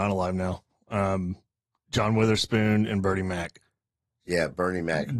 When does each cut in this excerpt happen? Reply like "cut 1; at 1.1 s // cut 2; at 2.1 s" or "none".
none